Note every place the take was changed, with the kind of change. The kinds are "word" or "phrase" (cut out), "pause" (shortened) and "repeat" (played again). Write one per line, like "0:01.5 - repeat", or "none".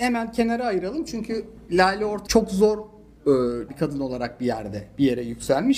0:02.3 - word
0:03.7 - word